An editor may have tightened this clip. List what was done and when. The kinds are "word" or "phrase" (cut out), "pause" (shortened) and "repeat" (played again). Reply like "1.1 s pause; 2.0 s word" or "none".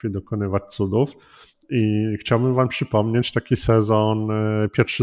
none